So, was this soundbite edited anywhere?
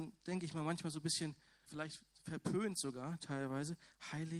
yes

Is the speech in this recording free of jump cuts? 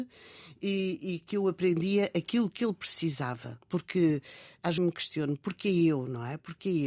no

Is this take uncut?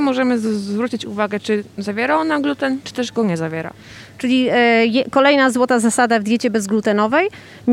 yes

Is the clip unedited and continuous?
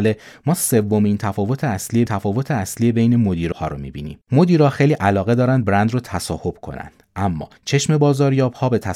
no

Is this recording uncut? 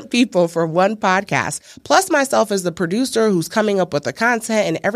yes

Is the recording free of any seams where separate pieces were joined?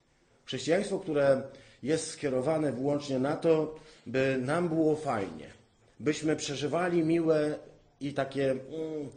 yes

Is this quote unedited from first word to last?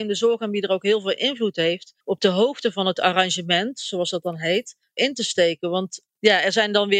no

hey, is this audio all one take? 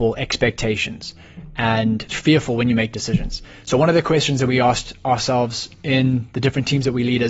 no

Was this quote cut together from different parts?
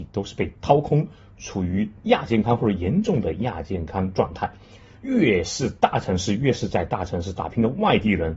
yes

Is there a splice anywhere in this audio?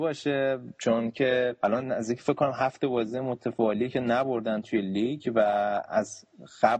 no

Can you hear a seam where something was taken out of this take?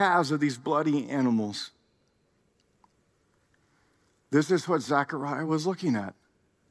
no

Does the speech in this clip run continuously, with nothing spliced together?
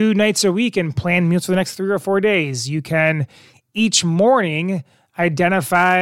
yes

